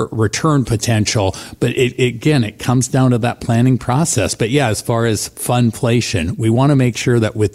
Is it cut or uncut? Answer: uncut